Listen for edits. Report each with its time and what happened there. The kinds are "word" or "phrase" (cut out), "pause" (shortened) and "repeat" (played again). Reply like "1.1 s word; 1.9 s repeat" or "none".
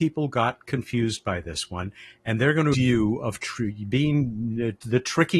2.7 s word